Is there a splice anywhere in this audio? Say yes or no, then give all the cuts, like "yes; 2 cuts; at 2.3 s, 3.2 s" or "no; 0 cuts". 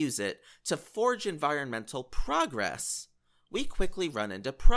no; 0 cuts